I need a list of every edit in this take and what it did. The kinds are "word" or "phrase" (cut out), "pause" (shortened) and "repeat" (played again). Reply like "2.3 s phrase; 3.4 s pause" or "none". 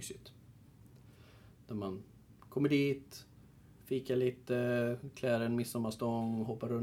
none